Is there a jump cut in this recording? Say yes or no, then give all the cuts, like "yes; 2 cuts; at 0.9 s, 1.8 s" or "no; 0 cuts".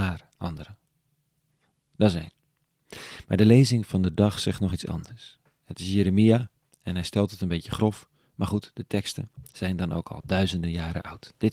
no; 0 cuts